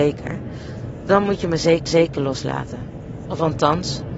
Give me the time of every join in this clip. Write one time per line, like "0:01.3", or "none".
0:01.9